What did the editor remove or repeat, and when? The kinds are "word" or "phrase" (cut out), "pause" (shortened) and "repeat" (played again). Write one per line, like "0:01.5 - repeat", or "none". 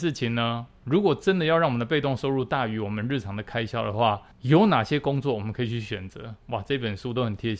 0:04.3 - pause